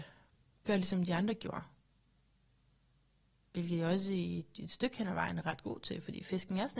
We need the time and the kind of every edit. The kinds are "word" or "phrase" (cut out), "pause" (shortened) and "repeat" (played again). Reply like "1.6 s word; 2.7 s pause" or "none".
none